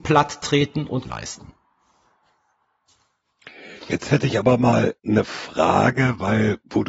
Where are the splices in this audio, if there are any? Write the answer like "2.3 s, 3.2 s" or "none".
1.1 s, 5.0 s